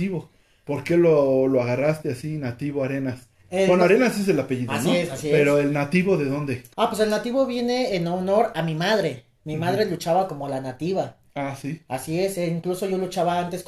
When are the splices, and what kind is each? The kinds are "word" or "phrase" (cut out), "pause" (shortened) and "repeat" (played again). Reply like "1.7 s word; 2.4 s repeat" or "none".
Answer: 6.7 s pause